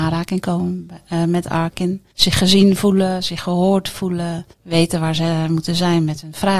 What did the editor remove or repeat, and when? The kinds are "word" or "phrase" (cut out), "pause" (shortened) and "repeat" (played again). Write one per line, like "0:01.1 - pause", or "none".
0:02.1 - pause
0:04.5 - pause